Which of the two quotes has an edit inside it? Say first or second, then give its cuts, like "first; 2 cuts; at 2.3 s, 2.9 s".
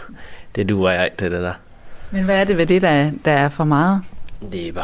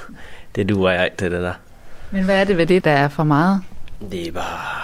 second; 1 cut; at 2.8 s